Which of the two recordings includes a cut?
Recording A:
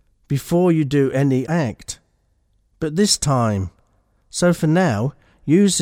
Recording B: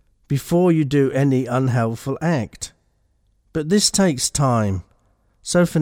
A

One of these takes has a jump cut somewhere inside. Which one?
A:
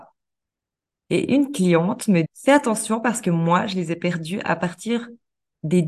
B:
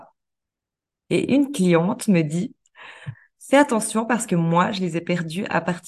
A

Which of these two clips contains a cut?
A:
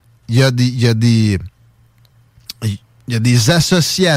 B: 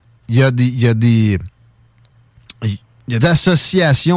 B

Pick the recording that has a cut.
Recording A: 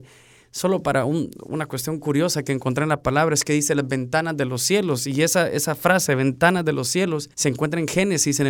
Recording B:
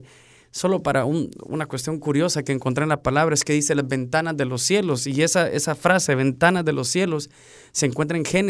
A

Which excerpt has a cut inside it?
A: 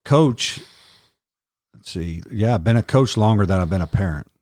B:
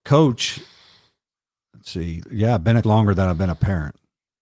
B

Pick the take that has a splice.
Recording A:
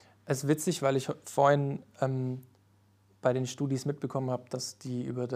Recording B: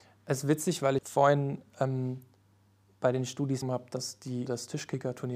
B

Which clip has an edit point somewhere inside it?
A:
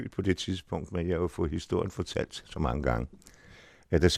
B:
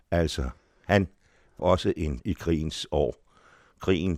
B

